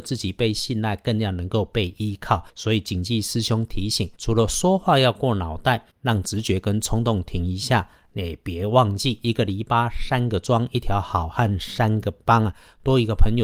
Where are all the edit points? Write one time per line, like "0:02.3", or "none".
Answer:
0:02.5
0:04.1
0:05.9